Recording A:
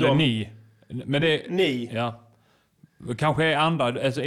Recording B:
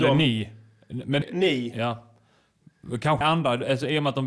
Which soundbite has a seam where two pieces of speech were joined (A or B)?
B